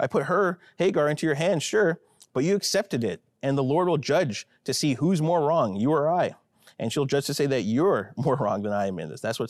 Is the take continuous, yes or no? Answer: yes